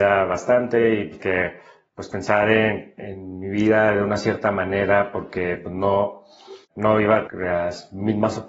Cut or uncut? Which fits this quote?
cut